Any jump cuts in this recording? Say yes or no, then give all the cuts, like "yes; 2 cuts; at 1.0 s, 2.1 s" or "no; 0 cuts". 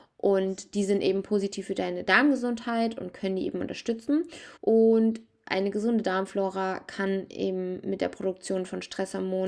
yes; 1 cut; at 4.6 s